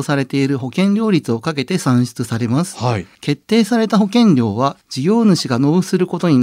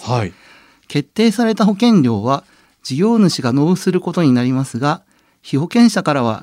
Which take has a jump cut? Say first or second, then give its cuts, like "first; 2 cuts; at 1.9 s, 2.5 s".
first; 2 cuts; at 3.1 s, 4.8 s